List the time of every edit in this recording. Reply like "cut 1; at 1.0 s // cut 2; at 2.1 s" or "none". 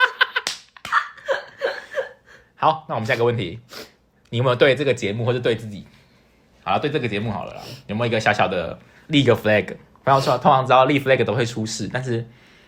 none